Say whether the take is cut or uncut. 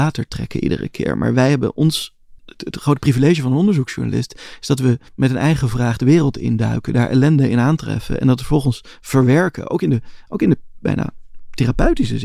cut